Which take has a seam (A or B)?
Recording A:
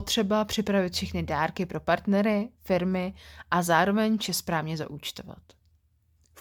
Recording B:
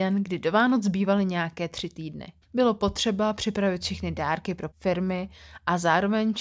B